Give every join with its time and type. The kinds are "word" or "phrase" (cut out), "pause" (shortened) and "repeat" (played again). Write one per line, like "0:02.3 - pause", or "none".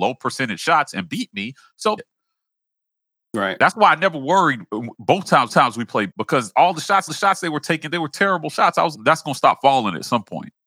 0:02.0 - word
0:05.5 - repeat
0:06.1 - word
0:07.1 - repeat
0:08.9 - word